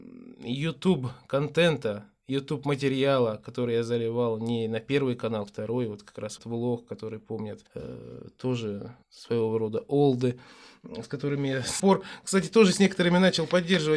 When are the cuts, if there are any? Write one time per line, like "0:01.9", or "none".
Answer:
0:05.5
0:06.4
0:07.7
0:09.0
0:11.8